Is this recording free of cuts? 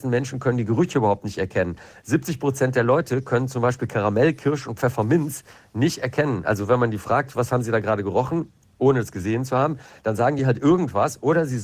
yes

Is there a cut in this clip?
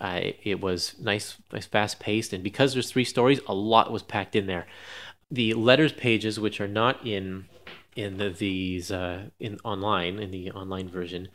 no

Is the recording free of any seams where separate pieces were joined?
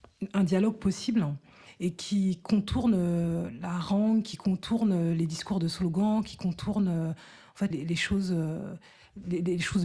no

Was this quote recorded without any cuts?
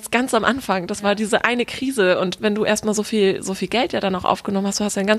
yes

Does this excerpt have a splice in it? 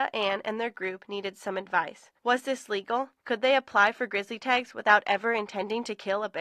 yes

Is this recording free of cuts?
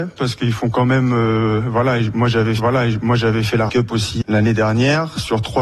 no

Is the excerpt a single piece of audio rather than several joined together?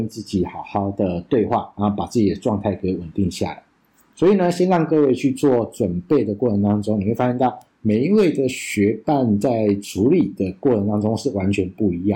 yes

